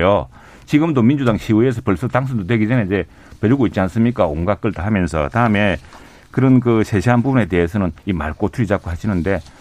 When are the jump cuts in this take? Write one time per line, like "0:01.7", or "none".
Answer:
0:08.0

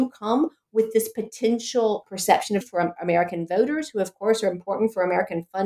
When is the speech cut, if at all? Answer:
0:02.0
0:02.6

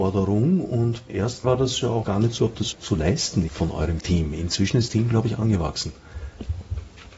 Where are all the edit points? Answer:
0:01.1
0:01.4
0:02.0
0:02.4
0:02.7
0:03.5
0:04.0
0:04.9

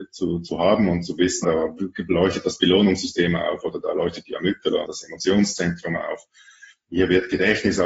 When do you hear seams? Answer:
0:01.4
0:04.9

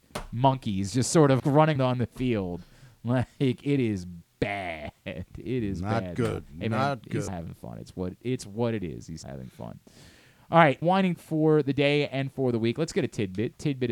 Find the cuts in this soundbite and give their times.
0:01.4
0:01.8
0:07.3
0:09.2
0:10.8
0:11.1

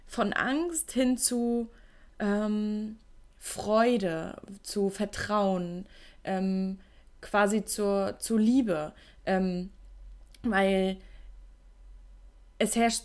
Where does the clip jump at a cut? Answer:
none

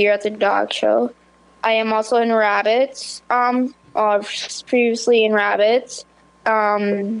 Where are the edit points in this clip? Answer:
none

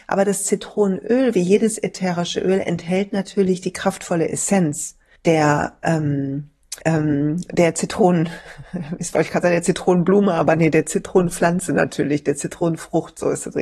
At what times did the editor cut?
0:05.2
0:06.8

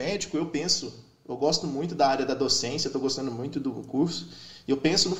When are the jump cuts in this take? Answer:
none

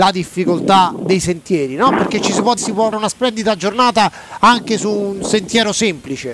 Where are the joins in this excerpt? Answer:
0:02.6
0:02.9

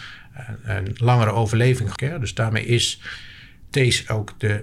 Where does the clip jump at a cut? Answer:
0:02.0

